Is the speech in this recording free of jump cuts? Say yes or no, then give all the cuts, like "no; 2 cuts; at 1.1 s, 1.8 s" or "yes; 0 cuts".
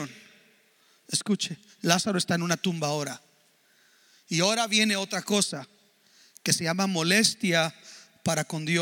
yes; 0 cuts